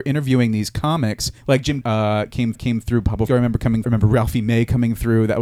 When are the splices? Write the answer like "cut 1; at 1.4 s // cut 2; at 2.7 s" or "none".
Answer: cut 1; at 1.4 s // cut 2; at 1.8 s // cut 3; at 2.5 s // cut 4; at 3.3 s // cut 5; at 3.8 s